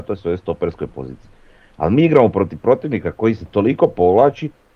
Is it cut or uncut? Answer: uncut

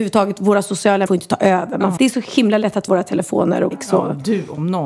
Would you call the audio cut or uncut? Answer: cut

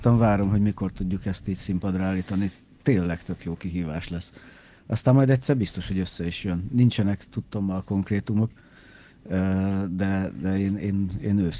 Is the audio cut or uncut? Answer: uncut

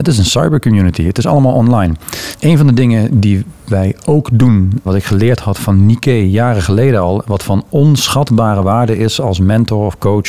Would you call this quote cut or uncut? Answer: uncut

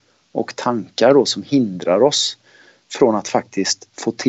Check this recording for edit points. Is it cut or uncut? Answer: uncut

